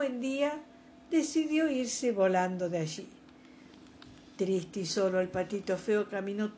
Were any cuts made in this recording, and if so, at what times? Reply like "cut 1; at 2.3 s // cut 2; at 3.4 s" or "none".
cut 1; at 0.9 s